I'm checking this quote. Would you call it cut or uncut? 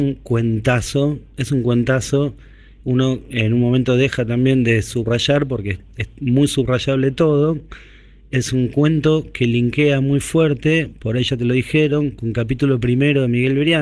uncut